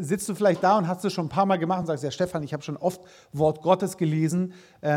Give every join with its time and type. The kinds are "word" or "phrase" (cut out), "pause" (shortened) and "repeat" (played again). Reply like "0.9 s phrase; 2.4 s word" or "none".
none